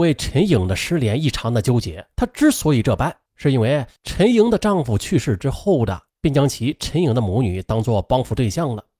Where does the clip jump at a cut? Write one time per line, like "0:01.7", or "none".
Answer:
0:02.1
0:03.3
0:04.0
0:06.1